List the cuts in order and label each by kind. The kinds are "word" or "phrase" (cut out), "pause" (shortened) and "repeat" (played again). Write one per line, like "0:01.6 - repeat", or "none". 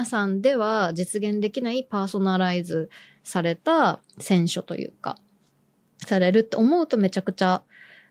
none